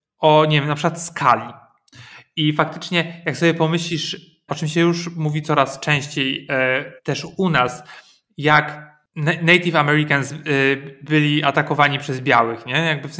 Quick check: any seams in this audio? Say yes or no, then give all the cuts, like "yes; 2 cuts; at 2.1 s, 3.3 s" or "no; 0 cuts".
yes; 2 cuts; at 4.5 s, 7.0 s